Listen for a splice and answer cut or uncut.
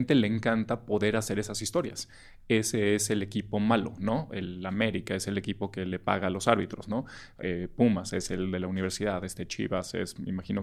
uncut